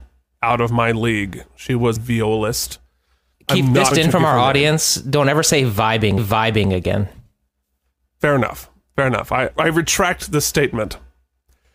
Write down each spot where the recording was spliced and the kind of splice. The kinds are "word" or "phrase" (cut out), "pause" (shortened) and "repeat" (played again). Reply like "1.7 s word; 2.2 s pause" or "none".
2.0 s word; 3.9 s word; 6.2 s repeat; 9.5 s word